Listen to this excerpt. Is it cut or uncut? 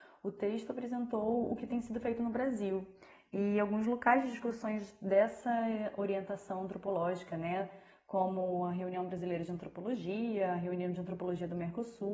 uncut